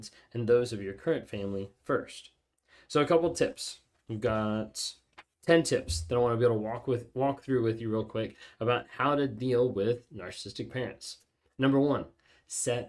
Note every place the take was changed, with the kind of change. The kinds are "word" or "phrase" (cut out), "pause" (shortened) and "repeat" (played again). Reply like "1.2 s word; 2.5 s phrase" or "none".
none